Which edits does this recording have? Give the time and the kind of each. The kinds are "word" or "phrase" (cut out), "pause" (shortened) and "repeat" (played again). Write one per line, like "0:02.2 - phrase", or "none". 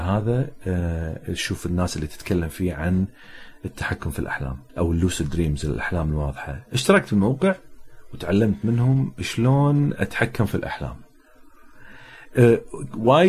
0:04.7 - pause